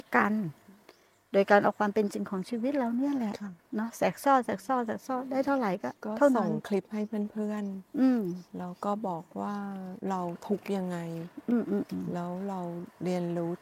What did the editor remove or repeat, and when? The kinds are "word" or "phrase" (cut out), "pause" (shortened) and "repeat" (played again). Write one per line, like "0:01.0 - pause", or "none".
0:06.0 - pause
0:10.0 - pause